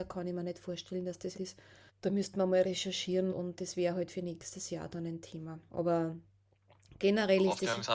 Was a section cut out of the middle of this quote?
yes; 3 cuts; at 1.3 s, 1.9 s, 3.3 s

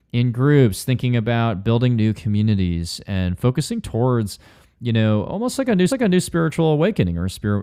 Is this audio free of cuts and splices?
no; 2 cuts; at 4.8 s, 5.9 s

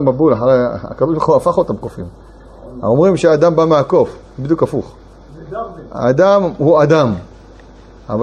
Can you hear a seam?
no; 0 cuts

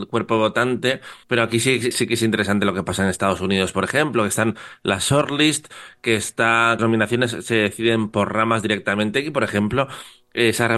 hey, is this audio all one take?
no; 3 cuts; at 1.2 s, 1.9 s, 6.8 s

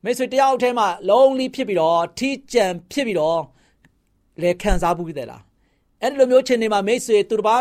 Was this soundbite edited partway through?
no; 0 cuts

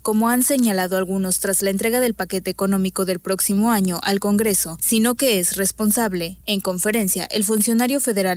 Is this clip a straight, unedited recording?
yes; 0 cuts

